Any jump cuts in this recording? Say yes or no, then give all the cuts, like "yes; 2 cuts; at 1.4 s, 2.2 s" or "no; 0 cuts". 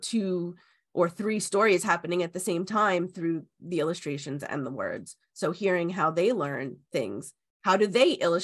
no; 0 cuts